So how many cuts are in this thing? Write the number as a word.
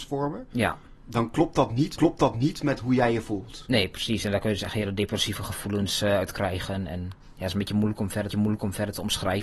two